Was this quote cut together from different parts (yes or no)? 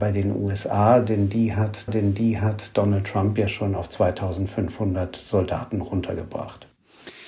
yes